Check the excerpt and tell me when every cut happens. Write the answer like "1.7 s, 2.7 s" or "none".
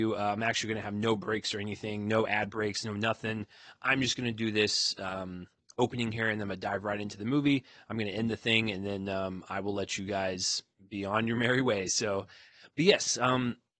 none